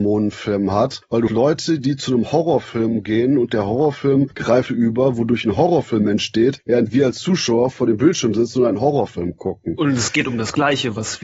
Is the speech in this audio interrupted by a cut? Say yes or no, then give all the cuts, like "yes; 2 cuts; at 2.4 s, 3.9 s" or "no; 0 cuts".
yes; 2 cuts; at 1.3 s, 4.7 s